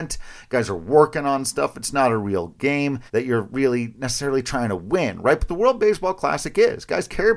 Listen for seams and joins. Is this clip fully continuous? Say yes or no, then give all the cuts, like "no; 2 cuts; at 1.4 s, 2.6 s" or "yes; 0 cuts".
no; 1 cut; at 3.1 s